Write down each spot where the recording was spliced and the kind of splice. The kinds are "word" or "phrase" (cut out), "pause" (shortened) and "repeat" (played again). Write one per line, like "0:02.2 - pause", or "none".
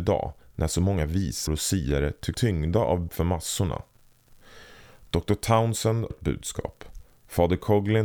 0:01.5 - word
0:02.3 - word
0:03.1 - word
0:06.1 - word